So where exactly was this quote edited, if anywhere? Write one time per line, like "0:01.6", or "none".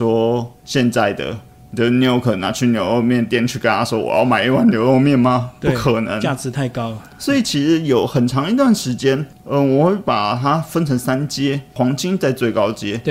none

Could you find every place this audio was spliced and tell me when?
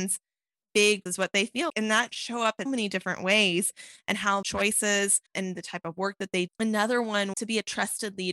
0:01.1
0:01.7
0:02.1
0:02.7
0:04.4
0:05.3
0:06.5
0:07.3

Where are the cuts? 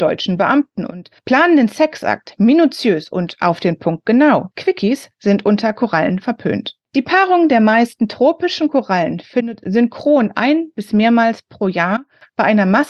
0:01.2
0:04.5
0:06.8

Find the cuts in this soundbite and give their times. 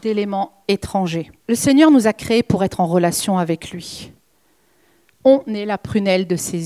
0:01.4

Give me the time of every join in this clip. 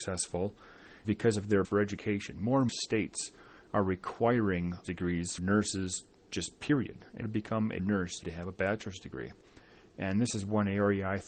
0:01.0
0:01.6
0:02.7
0:04.8
0:05.4
0:07.2
0:07.8
0:08.2

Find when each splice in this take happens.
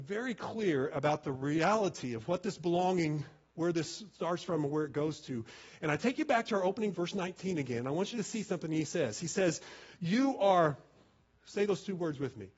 0:06.9

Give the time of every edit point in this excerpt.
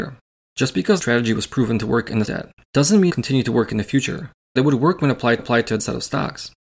0:01.0
0:02.2
0:03.1
0:04.6
0:05.4
0:05.8

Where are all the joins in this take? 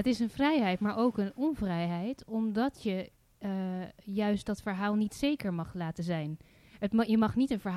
none

